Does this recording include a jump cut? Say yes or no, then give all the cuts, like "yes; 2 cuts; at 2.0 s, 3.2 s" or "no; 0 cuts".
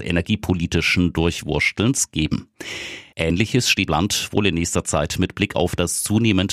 yes; 1 cut; at 3.9 s